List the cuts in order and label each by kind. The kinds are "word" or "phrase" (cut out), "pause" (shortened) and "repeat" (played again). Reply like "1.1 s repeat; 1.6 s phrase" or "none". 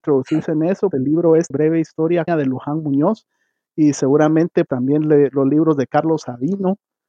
0.9 s word; 1.5 s word; 2.3 s word; 4.7 s word